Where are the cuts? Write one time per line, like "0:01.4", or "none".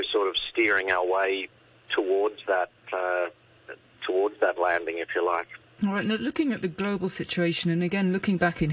none